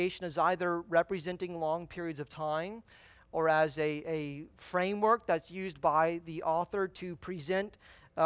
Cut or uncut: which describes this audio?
uncut